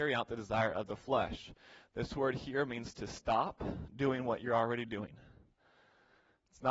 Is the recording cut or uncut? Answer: uncut